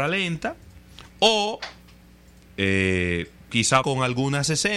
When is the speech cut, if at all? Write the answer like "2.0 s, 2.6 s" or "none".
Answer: 3.8 s